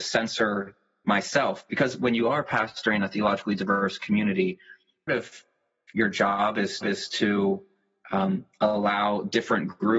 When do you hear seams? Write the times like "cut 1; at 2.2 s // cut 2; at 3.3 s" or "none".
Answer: cut 1; at 5.1 s // cut 2; at 6.8 s